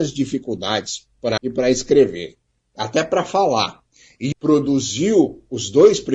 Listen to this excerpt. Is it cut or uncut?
cut